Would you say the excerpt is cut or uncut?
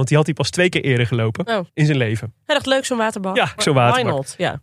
cut